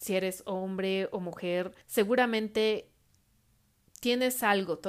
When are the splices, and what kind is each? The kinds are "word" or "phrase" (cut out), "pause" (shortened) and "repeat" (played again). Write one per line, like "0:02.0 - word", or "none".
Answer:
0:01.8 - pause